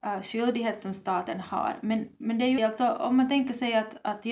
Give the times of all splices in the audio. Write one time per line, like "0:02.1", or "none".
0:02.6

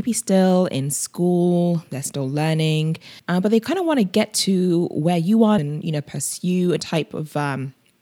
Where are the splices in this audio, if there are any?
0:03.2
0:05.6
0:06.8

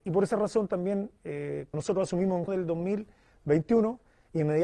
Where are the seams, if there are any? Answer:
0:01.7
0:02.5

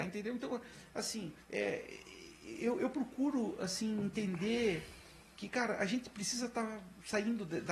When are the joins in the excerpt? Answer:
0:01.4

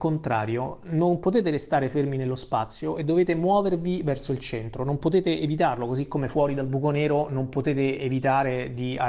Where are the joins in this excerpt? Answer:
none

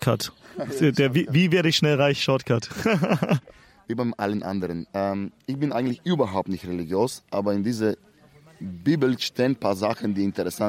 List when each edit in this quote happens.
0:03.5

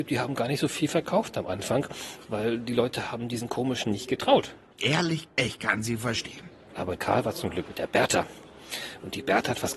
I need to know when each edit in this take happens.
0:03.8
0:05.3
0:07.0
0:07.7

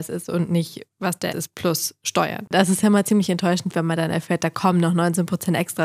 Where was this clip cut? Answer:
0:01.3

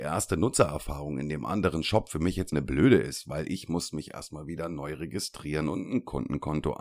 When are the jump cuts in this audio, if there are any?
0:02.5

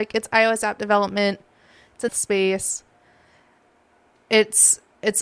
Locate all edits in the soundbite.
0:02.1

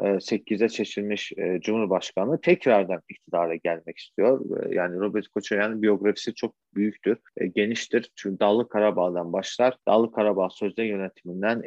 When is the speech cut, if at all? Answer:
0:09.8

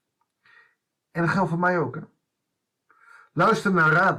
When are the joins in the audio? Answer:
none

